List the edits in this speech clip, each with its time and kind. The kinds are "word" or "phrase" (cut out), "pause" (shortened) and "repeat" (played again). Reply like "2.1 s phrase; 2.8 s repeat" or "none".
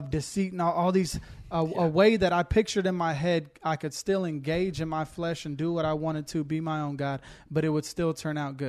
none